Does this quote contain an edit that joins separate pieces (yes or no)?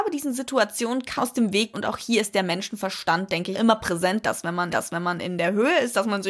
yes